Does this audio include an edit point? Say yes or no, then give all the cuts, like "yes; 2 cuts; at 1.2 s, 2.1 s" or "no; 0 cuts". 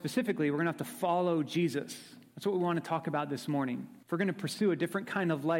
yes; 1 cut; at 4.0 s